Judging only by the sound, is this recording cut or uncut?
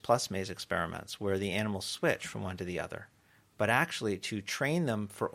uncut